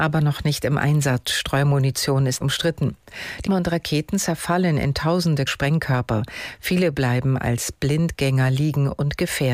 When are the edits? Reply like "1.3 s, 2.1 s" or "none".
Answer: 2.4 s, 3.5 s, 5.5 s